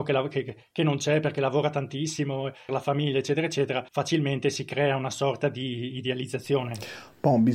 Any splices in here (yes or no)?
yes